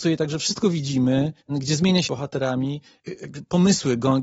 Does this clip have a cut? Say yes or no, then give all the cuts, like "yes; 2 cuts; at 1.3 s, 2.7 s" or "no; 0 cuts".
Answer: yes; 2 cuts; at 1.4 s, 2.1 s